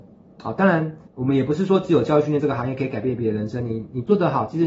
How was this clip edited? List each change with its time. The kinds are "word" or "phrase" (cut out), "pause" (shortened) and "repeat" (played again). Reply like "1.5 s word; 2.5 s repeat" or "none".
1.1 s pause